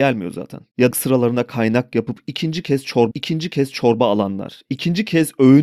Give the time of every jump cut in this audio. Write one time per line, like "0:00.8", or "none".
0:00.9
0:03.1